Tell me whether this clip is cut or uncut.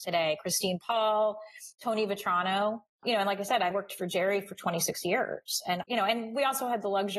cut